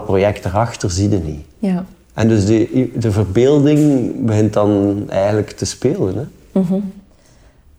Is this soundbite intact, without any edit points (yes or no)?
yes